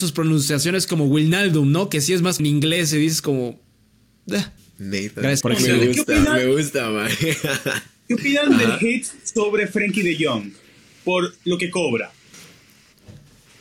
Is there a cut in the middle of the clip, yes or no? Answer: yes